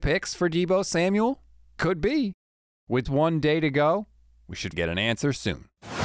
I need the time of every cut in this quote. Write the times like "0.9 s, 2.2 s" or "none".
3.0 s, 4.7 s